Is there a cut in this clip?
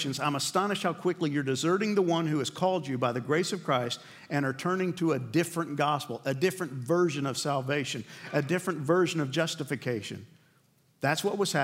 no; 0 cuts

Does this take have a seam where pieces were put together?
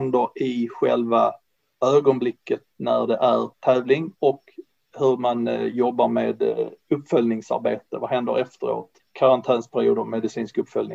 yes; 2 cuts; at 3.5 s, 9.0 s

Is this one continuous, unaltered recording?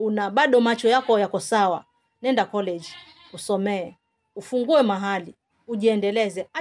yes; 0 cuts

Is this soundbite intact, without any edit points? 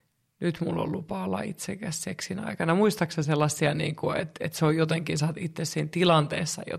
yes; 0 cuts

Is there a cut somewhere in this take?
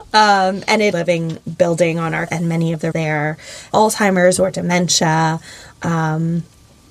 yes; 4 cuts; at 0.9 s, 2.3 s, 2.9 s, 3.7 s

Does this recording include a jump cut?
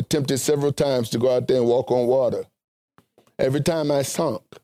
no; 0 cuts

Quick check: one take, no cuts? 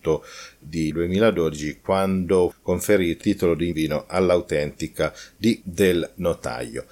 no; 5 cuts; at 0.9 s, 2.5 s, 3.2 s, 3.7 s, 5.6 s

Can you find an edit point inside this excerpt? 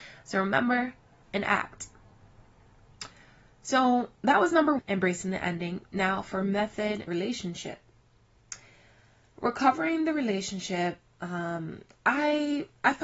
yes; 4 cuts; at 1.2 s, 4.1 s, 4.8 s, 7.1 s

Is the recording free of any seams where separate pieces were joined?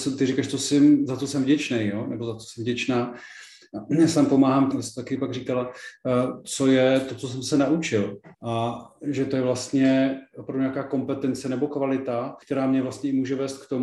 no; 3 cuts; at 4.7 s, 8.3 s, 12.4 s

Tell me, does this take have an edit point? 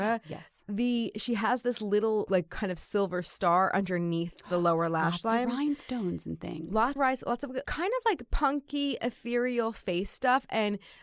yes; 3 cuts; at 2.3 s, 7.0 s, 7.6 s

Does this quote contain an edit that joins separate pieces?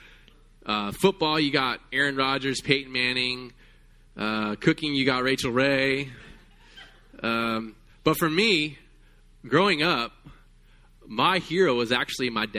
no; 0 cuts

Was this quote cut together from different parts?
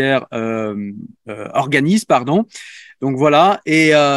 yes; 1 cut; at 1.2 s

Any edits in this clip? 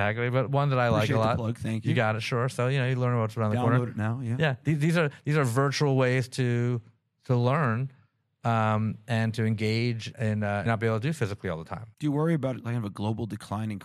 yes; 2 cuts; at 10.1 s, 10.7 s

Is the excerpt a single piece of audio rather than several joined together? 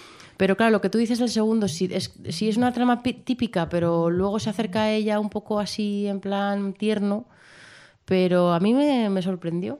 yes; 0 cuts

